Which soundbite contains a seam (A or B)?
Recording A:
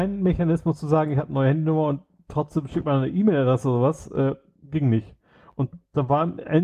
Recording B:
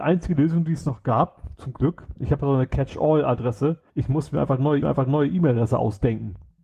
B